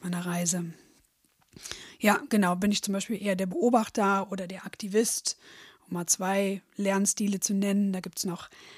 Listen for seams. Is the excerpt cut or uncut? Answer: uncut